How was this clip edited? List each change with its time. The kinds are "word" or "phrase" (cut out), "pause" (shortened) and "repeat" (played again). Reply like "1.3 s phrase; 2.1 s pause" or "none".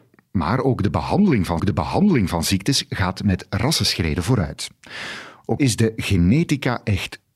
1.6 s repeat; 5.6 s word

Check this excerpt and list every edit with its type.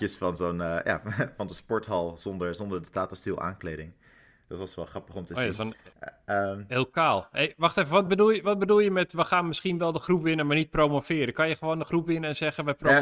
none

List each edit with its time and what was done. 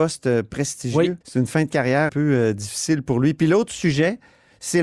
1.2 s pause; 2.1 s word

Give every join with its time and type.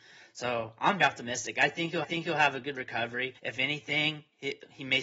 1.0 s word; 2.0 s repeat; 3.4 s pause

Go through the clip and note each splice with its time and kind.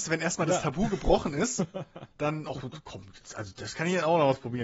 none

